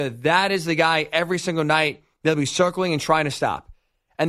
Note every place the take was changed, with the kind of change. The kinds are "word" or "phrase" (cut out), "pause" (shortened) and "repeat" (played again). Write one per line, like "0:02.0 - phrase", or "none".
0:02.1 - pause